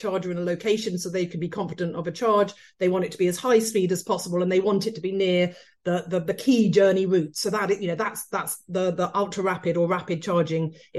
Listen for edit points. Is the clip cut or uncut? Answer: uncut